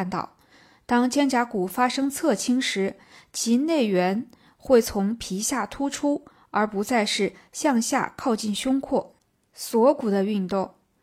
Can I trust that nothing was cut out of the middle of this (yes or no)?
yes